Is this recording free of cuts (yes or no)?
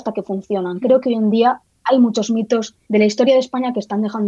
no